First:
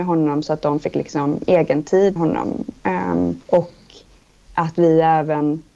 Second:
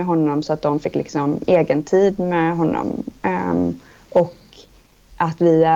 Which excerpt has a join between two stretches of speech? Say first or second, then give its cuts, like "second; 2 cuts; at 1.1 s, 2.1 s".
first; 2 cuts; at 2.2 s, 3.4 s